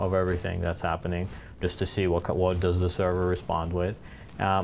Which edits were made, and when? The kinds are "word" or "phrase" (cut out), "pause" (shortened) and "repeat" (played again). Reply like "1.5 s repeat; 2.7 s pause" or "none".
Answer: none